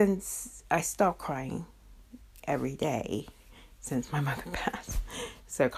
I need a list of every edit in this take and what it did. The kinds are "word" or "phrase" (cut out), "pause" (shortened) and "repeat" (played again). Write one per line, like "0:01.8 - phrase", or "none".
none